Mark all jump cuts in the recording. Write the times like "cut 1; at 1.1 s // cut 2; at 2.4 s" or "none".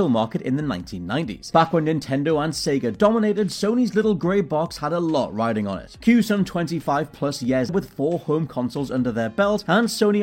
cut 1; at 7.7 s